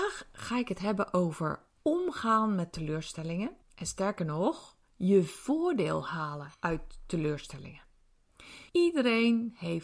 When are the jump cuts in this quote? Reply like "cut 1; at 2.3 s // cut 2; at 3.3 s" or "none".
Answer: cut 1; at 1.7 s // cut 2; at 3.6 s // cut 3; at 4.8 s // cut 4; at 6.5 s // cut 5; at 8.7 s